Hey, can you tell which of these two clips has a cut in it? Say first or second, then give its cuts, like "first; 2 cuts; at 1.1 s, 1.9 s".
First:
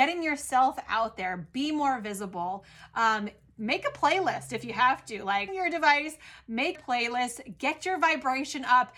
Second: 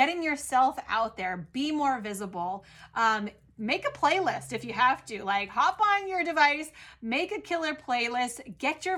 first; 2 cuts; at 5.5 s, 6.7 s